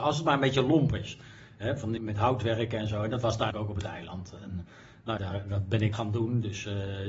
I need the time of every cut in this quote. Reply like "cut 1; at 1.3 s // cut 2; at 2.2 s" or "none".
cut 1; at 2.0 s // cut 2; at 3.5 s // cut 3; at 5.2 s // cut 4; at 5.9 s